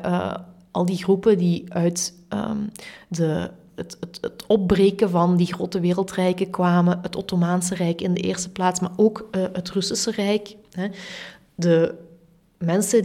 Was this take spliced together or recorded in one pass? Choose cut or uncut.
uncut